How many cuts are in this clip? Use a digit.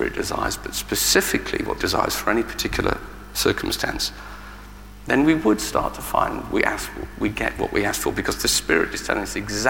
1